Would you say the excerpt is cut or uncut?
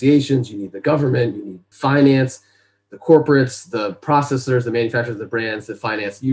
uncut